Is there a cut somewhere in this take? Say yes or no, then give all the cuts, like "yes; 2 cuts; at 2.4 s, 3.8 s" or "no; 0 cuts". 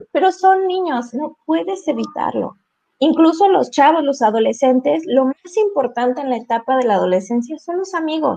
no; 0 cuts